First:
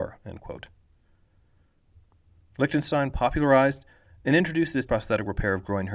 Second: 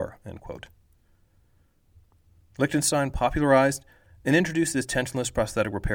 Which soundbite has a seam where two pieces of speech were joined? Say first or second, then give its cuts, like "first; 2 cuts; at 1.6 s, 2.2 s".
first; 1 cut; at 4.9 s